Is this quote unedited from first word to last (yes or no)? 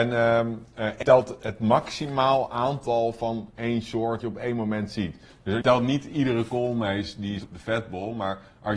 no